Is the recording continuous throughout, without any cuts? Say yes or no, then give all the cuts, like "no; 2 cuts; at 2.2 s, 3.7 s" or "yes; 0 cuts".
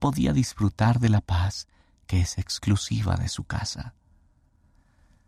yes; 0 cuts